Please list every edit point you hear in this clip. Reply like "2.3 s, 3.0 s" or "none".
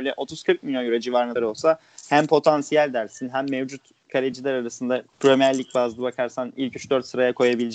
1.4 s, 5.1 s